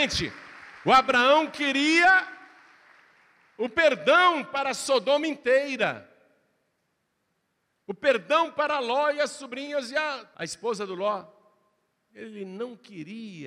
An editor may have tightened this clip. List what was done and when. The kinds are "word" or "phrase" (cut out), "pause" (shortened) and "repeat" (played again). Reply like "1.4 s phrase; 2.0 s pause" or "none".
none

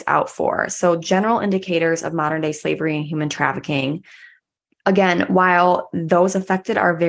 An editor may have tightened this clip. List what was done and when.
none

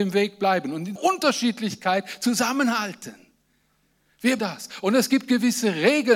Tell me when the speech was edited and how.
1.0 s word; 4.4 s word

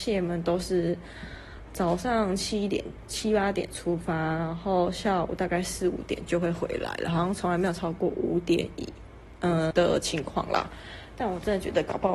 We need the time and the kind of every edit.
9.7 s word

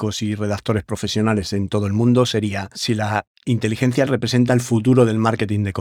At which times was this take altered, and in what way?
4.1 s word

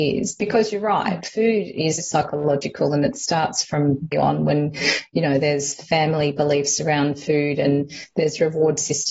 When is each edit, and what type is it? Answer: 2.0 s word; 4.1 s phrase

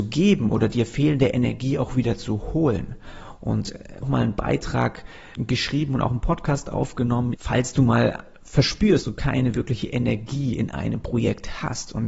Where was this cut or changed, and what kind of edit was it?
4.0 s phrase; 5.3 s word; 7.3 s word; 9.0 s word

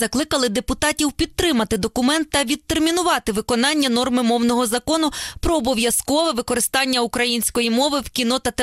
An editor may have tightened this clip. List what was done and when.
none

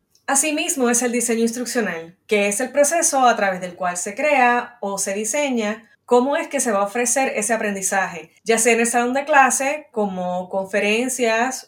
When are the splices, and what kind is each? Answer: 5.9 s pause; 8.4 s pause

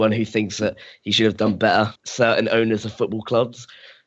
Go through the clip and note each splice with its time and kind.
1.9 s word

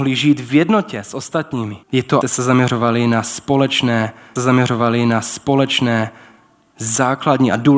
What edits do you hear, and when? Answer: 1.8 s pause; 2.2 s word; 4.4 s repeat

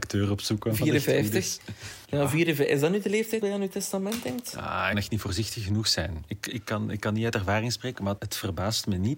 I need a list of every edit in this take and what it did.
2.0 s pause; 3.4 s word; 4.9 s phrase; 8.2 s word

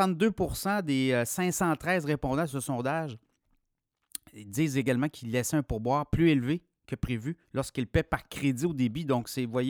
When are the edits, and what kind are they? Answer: 7.4 s pause

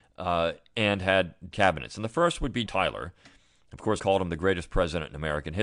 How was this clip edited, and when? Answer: 1.5 s word; 2.7 s word; 4.0 s word

